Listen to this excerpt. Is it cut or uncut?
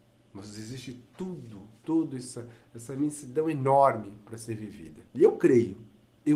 cut